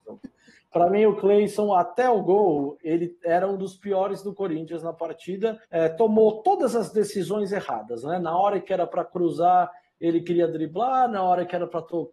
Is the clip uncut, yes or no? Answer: no